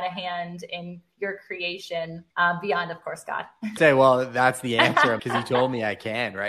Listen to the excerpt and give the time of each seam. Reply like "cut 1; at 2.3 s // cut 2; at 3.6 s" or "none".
cut 1; at 2.3 s // cut 2; at 3.8 s // cut 3; at 5.2 s